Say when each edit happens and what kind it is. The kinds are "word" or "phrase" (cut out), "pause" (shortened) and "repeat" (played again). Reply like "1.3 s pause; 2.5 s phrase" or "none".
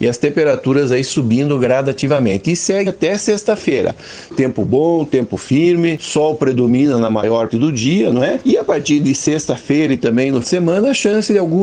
2.9 s word; 7.5 s word; 10.4 s word